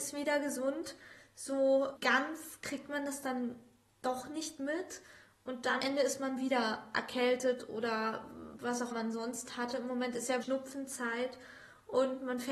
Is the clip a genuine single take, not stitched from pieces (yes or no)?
no